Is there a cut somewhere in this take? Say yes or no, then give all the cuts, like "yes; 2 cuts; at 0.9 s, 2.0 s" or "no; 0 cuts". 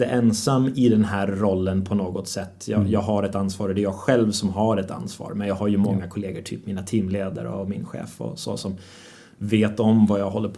no; 0 cuts